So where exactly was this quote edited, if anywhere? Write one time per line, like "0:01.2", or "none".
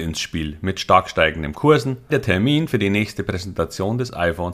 0:02.1